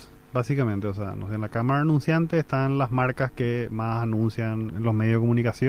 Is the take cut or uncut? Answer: cut